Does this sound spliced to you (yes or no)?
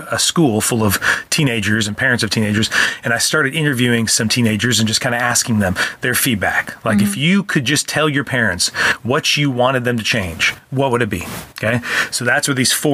no